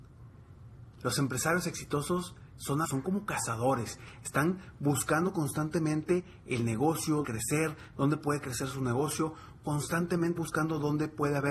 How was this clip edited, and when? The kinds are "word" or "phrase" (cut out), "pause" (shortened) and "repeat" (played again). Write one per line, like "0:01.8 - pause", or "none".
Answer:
0:02.8 - word
0:07.2 - phrase
0:10.4 - word